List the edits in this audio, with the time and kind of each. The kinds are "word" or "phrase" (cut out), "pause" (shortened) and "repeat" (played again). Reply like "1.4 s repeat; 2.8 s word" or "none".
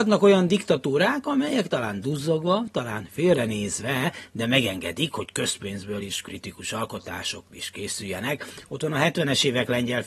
none

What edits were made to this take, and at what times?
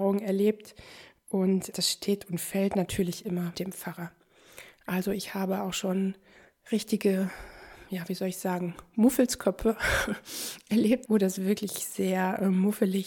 1.7 s word; 3.5 s word; 11.0 s word

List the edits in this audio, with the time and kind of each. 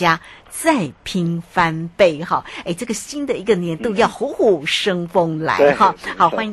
none

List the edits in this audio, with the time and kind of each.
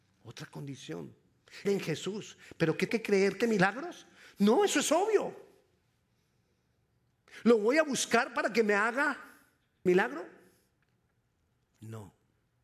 1.7 s word; 2.9 s word; 3.4 s word; 9.9 s word

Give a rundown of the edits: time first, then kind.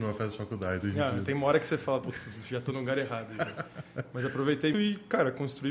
4.7 s word

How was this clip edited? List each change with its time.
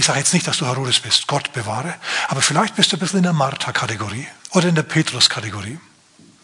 4.4 s pause

